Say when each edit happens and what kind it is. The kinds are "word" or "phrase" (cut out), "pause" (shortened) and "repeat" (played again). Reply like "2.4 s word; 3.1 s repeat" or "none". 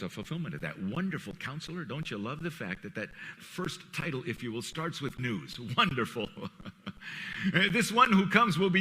3.4 s word; 5.2 s word